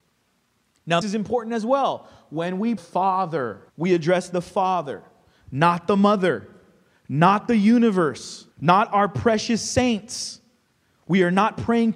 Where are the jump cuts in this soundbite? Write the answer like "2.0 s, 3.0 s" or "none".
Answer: 1.0 s, 2.8 s, 3.7 s, 8.5 s